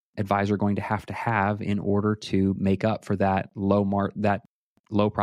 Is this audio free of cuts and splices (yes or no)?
yes